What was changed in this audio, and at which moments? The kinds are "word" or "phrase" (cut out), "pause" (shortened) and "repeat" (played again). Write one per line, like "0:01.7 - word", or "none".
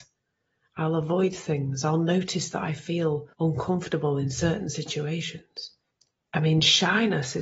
0:03.3 - pause
0:05.9 - pause